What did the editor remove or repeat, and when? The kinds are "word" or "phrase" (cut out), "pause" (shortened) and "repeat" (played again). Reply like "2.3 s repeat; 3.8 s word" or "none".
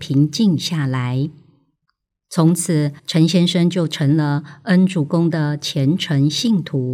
3.0 s pause